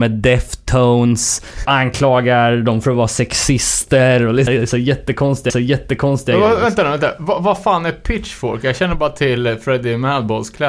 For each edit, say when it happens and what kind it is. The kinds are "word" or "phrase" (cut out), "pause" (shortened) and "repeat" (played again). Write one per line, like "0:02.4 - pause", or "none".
0:01.6 - word
0:04.5 - word
0:05.5 - repeat